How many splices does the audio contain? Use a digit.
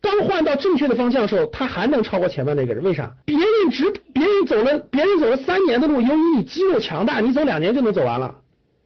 1